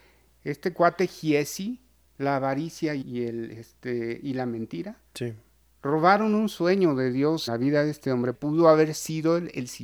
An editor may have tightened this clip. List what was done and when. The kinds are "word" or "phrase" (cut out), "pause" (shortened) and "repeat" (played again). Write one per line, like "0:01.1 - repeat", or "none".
0:02.0 - pause
0:03.0 - word
0:05.1 - pause
0:07.5 - word
0:08.3 - phrase